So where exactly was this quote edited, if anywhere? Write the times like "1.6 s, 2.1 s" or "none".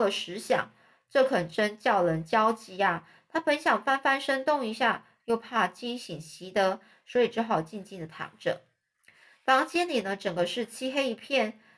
none